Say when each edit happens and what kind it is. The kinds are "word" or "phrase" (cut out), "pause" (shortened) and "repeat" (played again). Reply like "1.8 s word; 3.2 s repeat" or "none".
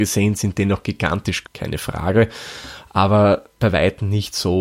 1.4 s word